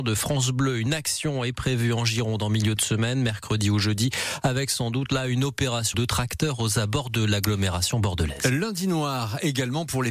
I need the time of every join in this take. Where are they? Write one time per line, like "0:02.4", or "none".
0:05.9